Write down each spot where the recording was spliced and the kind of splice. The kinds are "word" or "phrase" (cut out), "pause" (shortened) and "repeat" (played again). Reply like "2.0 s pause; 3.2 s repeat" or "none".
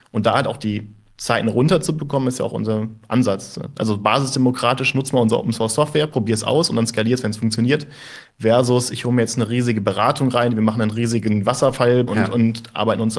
12.1 s word